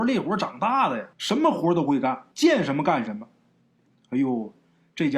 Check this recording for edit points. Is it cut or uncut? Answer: cut